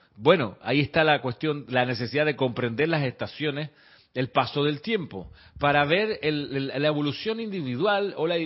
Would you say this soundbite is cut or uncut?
uncut